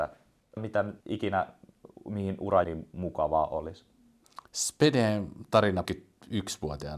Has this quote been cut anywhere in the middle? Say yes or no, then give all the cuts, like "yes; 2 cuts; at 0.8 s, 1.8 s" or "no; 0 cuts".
yes; 4 cuts; at 1.0 s, 2.6 s, 4.5 s, 5.8 s